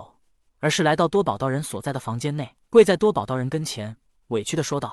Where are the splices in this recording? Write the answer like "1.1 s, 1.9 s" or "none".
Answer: 2.6 s